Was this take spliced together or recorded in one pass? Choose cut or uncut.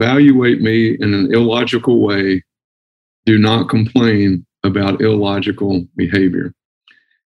uncut